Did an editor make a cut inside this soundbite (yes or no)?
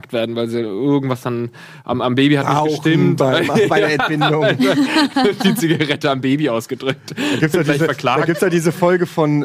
no